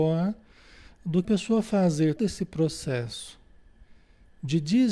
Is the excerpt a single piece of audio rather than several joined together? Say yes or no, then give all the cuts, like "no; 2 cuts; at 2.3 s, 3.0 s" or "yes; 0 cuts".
no; 2 cuts; at 1.2 s, 2.2 s